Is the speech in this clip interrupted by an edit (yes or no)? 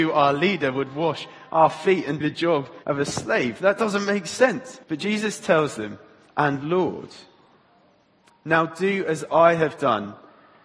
yes